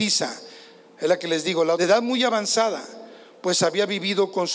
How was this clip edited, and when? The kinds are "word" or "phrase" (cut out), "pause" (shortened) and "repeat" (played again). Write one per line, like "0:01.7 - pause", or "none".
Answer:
0:01.8 - phrase